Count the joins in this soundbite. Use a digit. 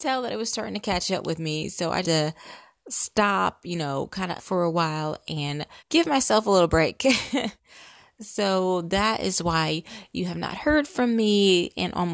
4